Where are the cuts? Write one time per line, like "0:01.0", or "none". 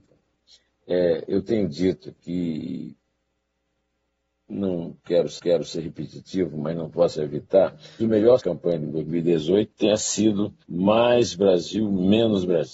0:05.4
0:08.0
0:08.4
0:08.9
0:10.6